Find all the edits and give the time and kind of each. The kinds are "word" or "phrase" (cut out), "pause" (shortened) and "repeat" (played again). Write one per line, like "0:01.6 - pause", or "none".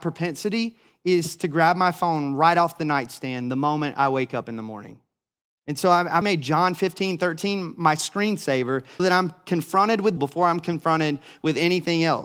0:06.2 - word
0:09.0 - word
0:10.2 - word